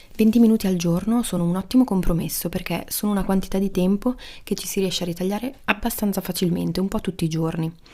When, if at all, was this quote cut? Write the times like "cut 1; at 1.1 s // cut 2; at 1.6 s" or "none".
none

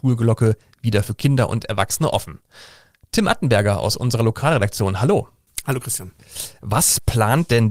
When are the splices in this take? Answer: none

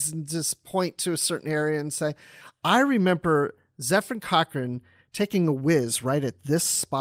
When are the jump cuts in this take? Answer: none

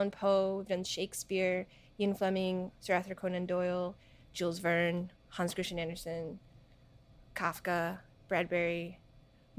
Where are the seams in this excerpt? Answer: none

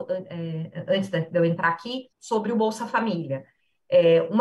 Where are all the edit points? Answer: cut 1; at 2.1 s

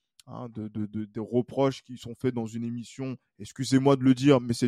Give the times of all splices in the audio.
none

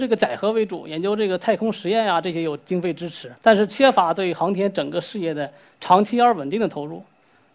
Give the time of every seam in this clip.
cut 1; at 3.4 s

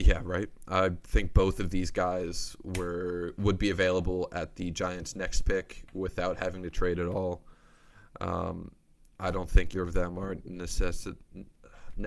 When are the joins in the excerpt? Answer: cut 1; at 9.7 s

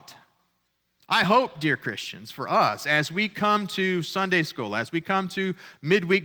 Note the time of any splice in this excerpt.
none

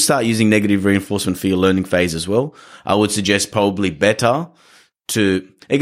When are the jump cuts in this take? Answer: none

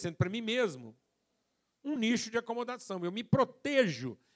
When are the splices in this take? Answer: none

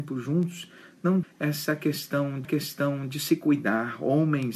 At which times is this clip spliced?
cut 1; at 1.2 s // cut 2; at 2.4 s

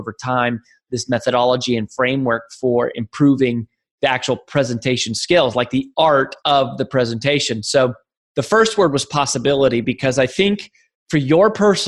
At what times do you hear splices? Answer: none

